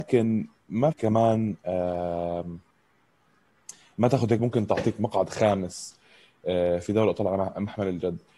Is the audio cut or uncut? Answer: cut